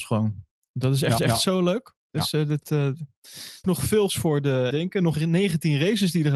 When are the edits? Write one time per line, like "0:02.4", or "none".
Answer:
0:01.2
0:02.0
0:03.6
0:04.1
0:04.7
0:05.1